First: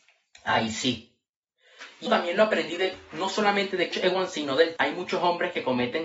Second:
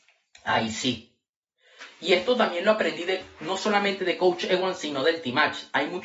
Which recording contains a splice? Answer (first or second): first